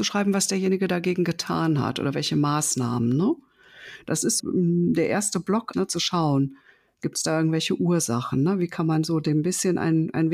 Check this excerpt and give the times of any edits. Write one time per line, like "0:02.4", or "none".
0:04.4
0:05.7